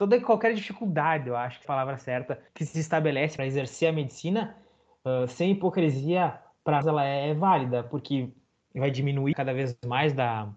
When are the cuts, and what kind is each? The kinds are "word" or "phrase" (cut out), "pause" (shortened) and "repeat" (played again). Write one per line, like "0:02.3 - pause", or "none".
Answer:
0:01.6 - phrase
0:02.5 - pause
0:03.4 - word
0:06.8 - word
0:09.3 - phrase